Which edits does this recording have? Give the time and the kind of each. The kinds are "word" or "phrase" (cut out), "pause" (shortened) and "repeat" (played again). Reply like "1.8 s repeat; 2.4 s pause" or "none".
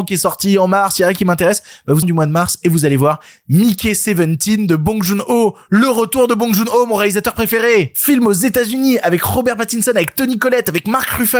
2.0 s phrase